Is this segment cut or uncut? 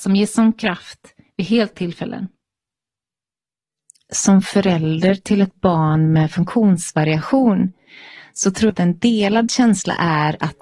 cut